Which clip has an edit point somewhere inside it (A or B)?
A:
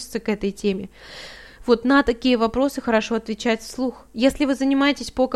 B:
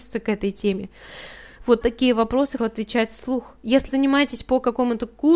B